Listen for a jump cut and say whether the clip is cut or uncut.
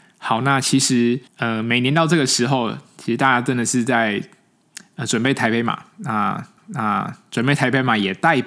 cut